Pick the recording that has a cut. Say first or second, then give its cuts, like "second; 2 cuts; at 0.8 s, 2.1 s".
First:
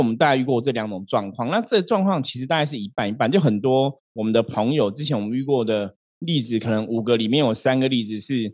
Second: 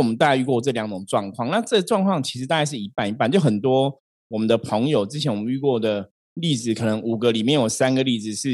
first; 1 cut; at 4.0 s